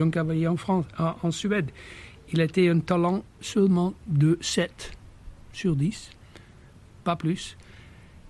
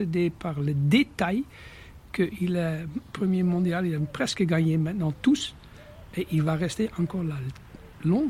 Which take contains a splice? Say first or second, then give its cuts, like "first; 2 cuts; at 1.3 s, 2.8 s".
second; 1 cut; at 3.1 s